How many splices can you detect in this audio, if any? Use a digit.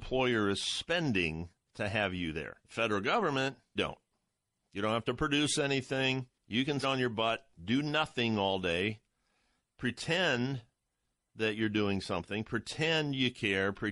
6